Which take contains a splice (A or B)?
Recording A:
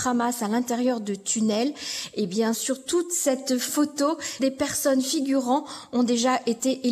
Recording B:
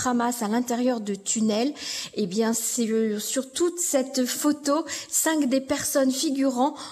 A